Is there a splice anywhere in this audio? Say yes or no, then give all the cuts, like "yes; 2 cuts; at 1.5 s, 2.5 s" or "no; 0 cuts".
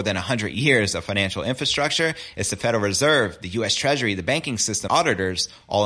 yes; 1 cut; at 4.9 s